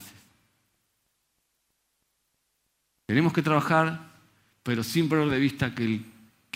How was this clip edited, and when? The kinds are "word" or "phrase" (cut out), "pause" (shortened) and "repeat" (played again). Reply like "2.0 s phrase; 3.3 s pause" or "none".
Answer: none